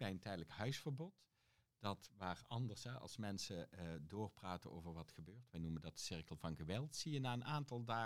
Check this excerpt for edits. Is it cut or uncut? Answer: uncut